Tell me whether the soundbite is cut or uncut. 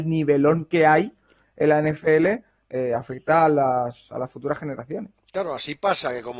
uncut